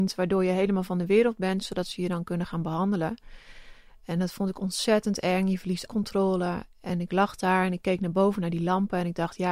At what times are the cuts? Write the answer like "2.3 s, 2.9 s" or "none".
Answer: 5.9 s